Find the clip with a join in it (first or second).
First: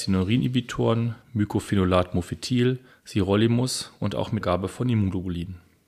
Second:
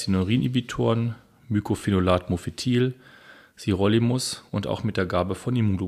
first